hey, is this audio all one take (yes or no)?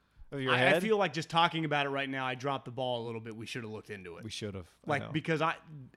yes